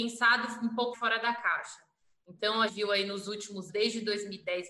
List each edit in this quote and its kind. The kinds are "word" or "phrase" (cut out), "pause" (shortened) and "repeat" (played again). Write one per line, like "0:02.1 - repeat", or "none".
0:00.9 - word
0:02.7 - word
0:03.7 - word